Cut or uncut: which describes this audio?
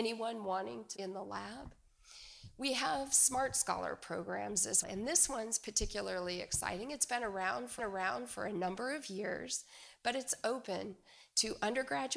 cut